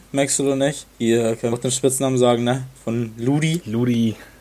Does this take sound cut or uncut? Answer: cut